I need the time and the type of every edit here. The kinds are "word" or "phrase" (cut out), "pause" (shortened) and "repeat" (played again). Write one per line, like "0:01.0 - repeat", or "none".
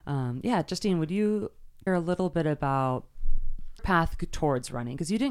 0:01.9 - word
0:03.8 - word